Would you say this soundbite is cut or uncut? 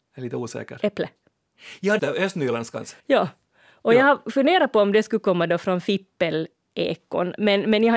cut